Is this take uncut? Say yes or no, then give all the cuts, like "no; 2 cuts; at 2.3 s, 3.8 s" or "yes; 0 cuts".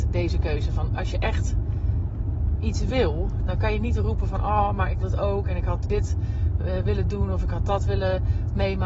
no; 2 cuts; at 5.0 s, 5.8 s